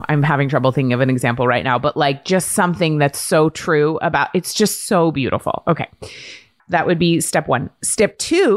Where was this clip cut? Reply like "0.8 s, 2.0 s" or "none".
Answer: none